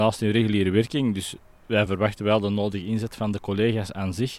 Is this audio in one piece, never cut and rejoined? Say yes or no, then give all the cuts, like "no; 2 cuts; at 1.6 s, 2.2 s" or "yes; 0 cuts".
yes; 0 cuts